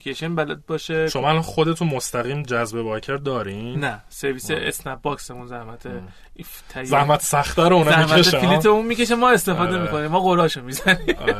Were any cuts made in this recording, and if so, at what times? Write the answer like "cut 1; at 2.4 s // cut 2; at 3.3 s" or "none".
none